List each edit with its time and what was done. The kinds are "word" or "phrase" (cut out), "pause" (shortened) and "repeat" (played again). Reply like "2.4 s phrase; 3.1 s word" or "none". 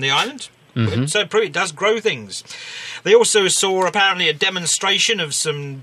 none